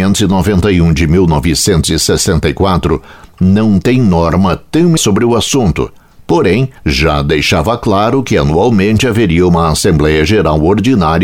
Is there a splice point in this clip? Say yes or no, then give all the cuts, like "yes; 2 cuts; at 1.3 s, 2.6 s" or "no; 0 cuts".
yes; 2 cuts; at 5.0 s, 6.8 s